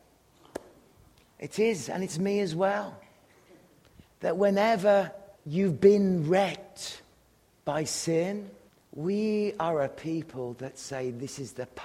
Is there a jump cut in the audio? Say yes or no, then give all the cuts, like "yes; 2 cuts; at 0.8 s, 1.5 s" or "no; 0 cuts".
yes; 3 cuts; at 4.1 s, 5.3 s, 8.7 s